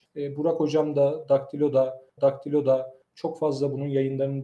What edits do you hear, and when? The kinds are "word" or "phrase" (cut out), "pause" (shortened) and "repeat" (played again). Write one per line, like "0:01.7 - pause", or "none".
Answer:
0:02.2 - repeat